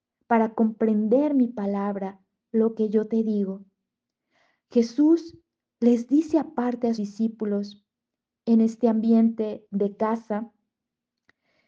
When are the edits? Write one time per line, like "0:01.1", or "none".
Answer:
0:07.0